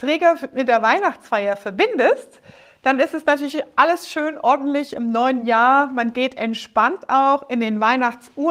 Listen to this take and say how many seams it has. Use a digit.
0